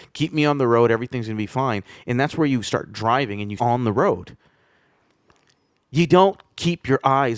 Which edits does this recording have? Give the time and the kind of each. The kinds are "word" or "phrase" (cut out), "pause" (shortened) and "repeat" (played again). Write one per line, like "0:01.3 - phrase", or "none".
0:03.6 - word